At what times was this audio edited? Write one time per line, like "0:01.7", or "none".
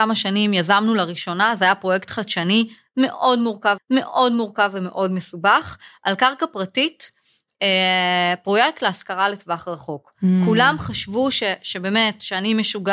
0:03.8